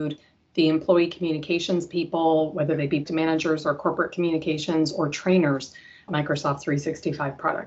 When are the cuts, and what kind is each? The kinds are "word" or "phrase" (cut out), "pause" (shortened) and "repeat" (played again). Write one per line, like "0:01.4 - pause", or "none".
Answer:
0:03.1 - word
0:06.1 - word